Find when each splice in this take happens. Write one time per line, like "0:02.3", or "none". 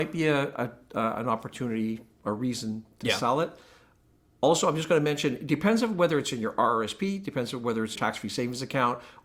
0:08.0

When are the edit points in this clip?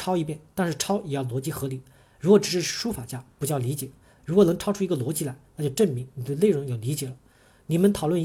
none

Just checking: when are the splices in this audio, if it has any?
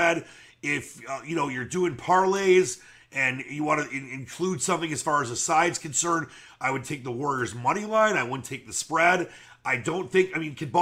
none

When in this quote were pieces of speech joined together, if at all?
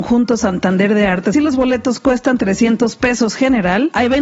0:01.3

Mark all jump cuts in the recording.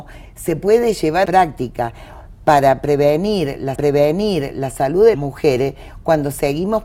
0:01.2
0:03.7
0:05.1

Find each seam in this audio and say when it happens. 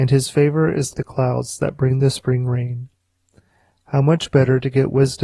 0:00.9

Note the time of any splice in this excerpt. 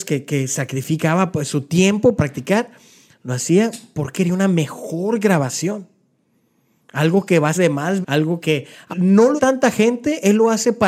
0:02.2
0:04.1
0:07.5
0:08.0
0:08.4
0:08.9
0:09.4

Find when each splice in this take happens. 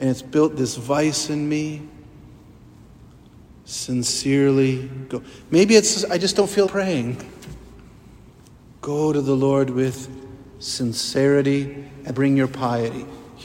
0:06.7
0:12.1

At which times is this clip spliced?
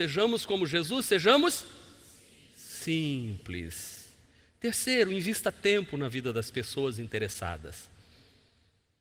none

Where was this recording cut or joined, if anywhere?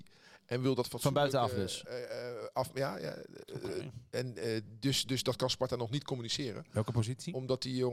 none

